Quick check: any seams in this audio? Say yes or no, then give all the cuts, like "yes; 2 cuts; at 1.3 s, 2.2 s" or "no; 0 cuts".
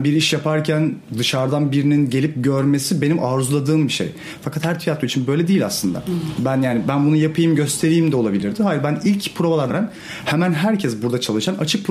yes; 1 cut; at 9.7 s